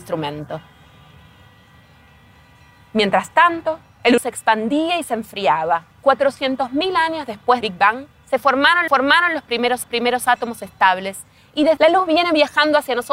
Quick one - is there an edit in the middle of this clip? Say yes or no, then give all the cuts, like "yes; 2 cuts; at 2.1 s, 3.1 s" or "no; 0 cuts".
yes; 6 cuts; at 4.2 s, 5.9 s, 7.6 s, 8.9 s, 9.8 s, 11.8 s